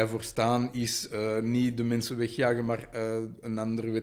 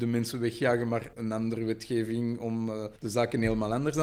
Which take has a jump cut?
second; 2 cuts; at 1.1 s, 3.0 s

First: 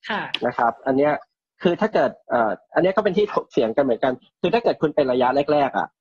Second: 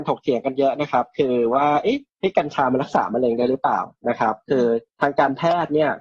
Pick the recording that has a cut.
second; 2 cuts; at 2.1 s, 4.9 s

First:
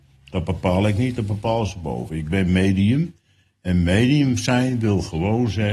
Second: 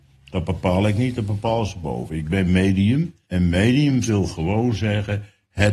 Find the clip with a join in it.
second; 2 cuts; at 3.2 s, 4.1 s

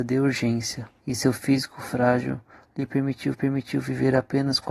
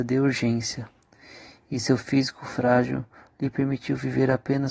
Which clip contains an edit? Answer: first; 2 cuts; at 1.0 s, 3.3 s

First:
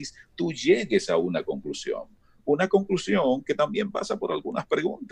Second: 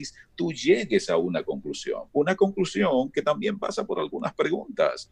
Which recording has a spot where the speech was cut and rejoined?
second; 1 cut; at 2.1 s

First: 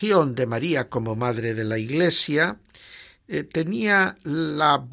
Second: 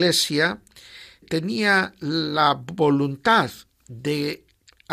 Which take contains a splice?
second; 1 cut; at 1.2 s

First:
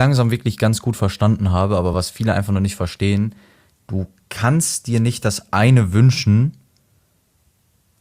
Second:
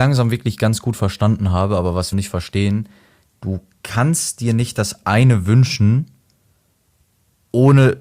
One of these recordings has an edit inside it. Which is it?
second; 1 cut; at 2.1 s

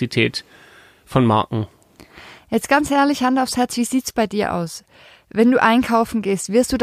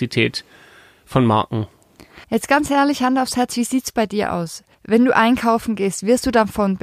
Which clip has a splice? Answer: second; 2 cuts; at 2.2 s, 4.7 s

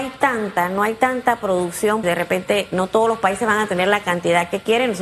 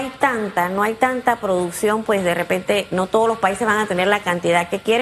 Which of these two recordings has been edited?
first; 1 cut; at 2.0 s

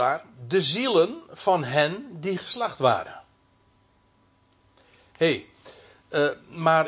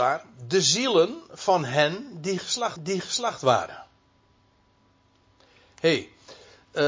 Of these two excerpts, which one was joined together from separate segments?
second; 1 cut; at 2.8 s

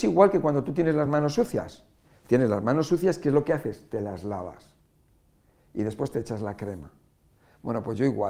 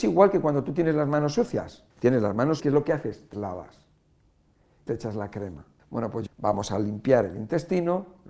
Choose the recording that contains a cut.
second; 6 cuts; at 1.9 s, 2.6 s, 3.3 s, 4.9 s, 5.8 s, 6.3 s

